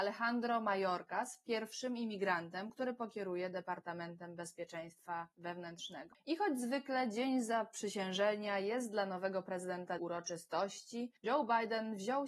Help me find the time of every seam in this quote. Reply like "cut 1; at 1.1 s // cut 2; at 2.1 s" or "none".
cut 1; at 10.0 s // cut 2; at 11.2 s